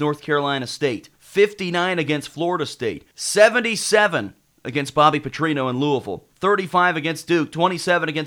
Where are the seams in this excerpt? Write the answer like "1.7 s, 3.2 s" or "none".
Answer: 1.1 s, 3.1 s, 6.3 s